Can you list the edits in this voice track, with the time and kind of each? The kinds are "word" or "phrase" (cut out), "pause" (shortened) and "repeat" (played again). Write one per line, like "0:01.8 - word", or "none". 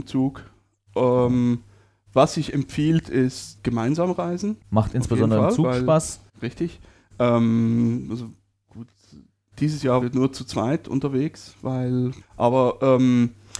0:03.6 - word
0:04.6 - pause
0:06.3 - pause
0:10.0 - word
0:12.2 - word